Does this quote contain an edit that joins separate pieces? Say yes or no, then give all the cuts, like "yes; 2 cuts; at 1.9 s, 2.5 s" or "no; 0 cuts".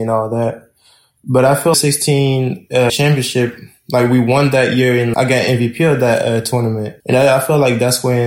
yes; 4 cuts; at 1.7 s, 2.9 s, 5.1 s, 7.0 s